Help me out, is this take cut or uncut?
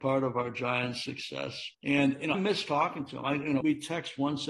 cut